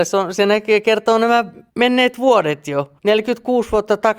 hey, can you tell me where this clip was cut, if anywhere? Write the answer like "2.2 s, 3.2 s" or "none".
1.7 s, 3.0 s